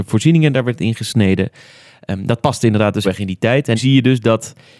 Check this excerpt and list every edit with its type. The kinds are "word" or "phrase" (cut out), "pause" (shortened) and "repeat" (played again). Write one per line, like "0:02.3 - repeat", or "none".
0:03.0 - word
0:03.8 - word

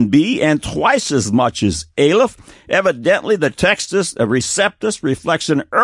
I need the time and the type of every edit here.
none

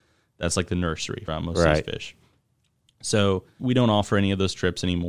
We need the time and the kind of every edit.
0:01.3 - word
0:03.6 - word

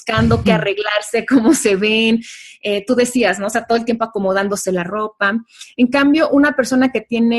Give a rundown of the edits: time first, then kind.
none

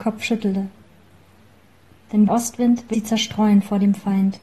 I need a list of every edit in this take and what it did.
0:02.3 - phrase
0:02.9 - word

